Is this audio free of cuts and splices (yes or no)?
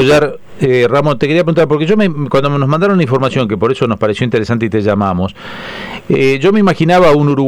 yes